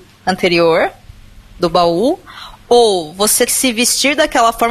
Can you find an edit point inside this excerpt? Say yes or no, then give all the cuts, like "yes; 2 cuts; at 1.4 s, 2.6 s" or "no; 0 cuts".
yes; 1 cut; at 3.5 s